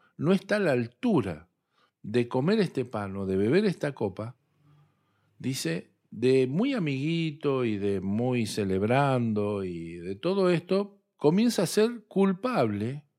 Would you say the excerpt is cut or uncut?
uncut